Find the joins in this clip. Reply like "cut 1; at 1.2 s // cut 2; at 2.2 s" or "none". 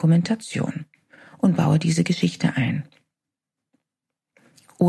none